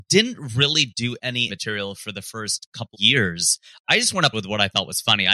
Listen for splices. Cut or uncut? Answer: cut